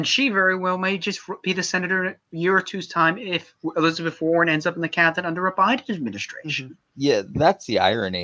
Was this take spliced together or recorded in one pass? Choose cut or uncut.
cut